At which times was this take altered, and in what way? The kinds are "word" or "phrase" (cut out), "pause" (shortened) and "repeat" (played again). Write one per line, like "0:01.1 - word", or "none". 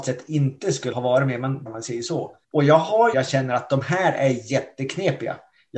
0:00.9 - word
0:01.7 - phrase
0:02.4 - pause
0:03.1 - phrase